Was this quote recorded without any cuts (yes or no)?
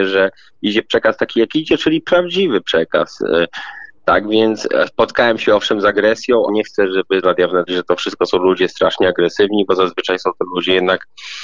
no